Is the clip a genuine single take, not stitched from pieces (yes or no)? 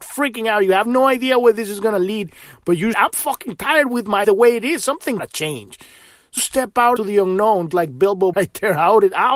no